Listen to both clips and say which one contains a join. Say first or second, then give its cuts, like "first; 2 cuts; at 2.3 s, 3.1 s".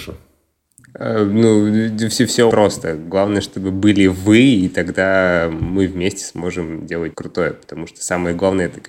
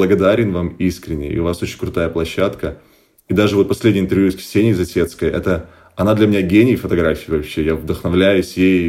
first; 2 cuts; at 2.5 s, 7.1 s